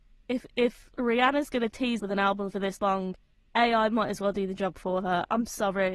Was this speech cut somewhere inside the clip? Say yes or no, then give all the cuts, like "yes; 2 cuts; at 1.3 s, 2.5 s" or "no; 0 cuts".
yes; 1 cut; at 2.0 s